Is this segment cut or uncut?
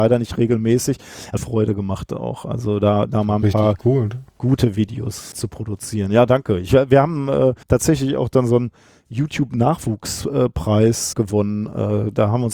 cut